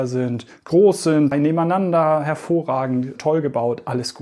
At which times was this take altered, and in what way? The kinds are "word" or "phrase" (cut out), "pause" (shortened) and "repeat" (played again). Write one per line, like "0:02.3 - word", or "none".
0:01.3 - word
0:03.2 - word